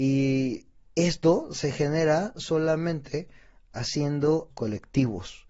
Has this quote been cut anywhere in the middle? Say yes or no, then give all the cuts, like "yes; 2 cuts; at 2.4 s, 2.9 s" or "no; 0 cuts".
yes; 1 cut; at 4.5 s